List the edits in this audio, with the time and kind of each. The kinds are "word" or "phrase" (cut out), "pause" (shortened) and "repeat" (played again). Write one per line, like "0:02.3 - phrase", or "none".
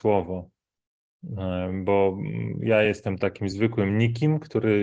none